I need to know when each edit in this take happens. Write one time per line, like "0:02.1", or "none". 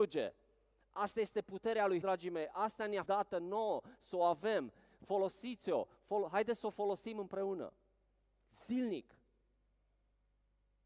0:02.0
0:03.1